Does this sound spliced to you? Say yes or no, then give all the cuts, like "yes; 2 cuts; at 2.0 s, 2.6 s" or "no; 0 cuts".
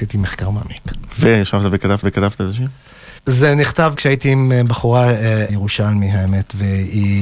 yes; 4 cuts; at 2.0 s, 3.2 s, 4.0 s, 5.5 s